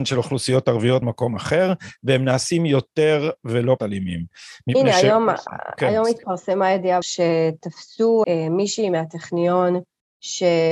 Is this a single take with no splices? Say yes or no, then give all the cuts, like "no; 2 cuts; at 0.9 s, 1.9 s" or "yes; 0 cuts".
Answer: no; 4 cuts; at 1.0 s, 3.8 s, 7.0 s, 8.2 s